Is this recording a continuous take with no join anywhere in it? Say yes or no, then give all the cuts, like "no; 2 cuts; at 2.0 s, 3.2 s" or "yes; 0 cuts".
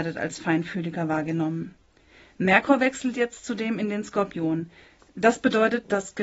yes; 0 cuts